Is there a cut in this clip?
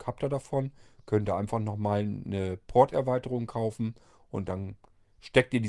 no; 0 cuts

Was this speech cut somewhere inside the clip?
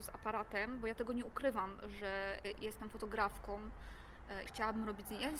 yes; 2 cuts; at 2.4 s, 4.5 s

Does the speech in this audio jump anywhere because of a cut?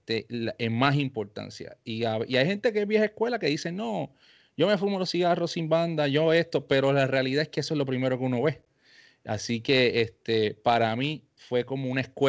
no; 0 cuts

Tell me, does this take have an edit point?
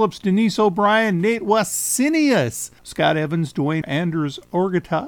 yes; 2 cuts; at 2.8 s, 3.8 s

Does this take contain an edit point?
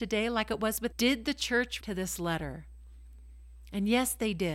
yes; 2 cuts; at 0.9 s, 1.8 s

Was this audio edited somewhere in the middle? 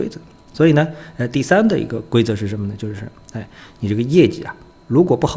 no; 0 cuts

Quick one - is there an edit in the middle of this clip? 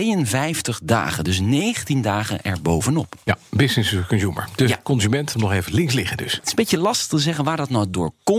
yes; 1 cut; at 5.3 s

